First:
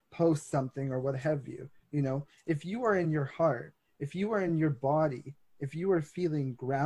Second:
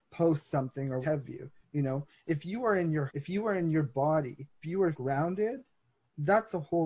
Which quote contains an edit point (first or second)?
second